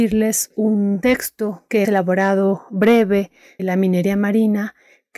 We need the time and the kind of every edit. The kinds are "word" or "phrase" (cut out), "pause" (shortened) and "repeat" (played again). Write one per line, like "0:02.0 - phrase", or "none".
0:01.8 - word
0:03.6 - word